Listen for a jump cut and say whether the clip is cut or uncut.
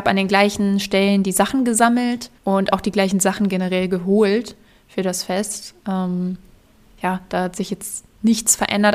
cut